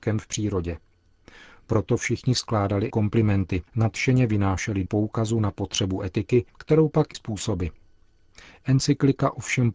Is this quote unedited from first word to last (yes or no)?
no